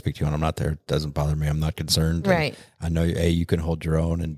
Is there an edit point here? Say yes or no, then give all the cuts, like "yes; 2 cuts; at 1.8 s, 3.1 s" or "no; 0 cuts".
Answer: no; 0 cuts